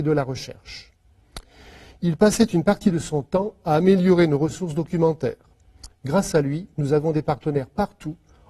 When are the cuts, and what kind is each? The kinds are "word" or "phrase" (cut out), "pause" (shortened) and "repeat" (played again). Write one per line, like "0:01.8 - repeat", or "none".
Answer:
none